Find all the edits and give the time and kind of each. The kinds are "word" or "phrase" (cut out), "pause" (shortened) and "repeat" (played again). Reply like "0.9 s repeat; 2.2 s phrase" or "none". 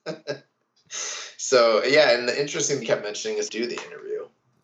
2.8 s word; 3.5 s phrase